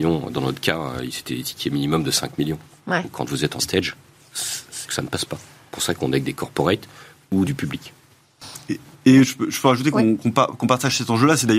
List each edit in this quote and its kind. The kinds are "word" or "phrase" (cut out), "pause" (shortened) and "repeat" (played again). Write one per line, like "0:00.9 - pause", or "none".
0:03.6 - word
0:04.9 - word
0:07.4 - word